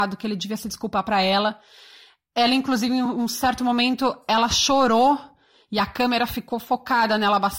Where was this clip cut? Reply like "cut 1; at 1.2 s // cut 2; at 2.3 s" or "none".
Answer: none